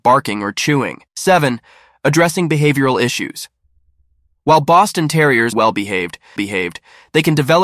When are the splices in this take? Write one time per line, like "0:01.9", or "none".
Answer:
0:01.1
0:05.5
0:06.4